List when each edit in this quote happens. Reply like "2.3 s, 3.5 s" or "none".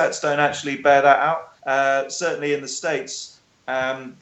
1.6 s